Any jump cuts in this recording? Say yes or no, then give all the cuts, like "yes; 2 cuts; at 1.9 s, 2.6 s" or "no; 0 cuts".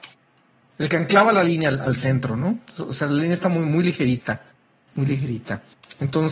no; 0 cuts